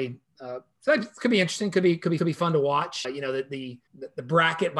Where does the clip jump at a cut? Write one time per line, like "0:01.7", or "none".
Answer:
0:02.2
0:03.0
0:03.9